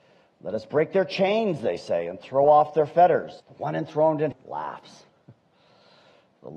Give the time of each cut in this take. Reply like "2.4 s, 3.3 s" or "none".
3.4 s, 4.3 s